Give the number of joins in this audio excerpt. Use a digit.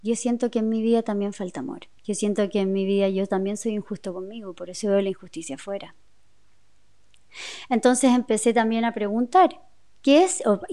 1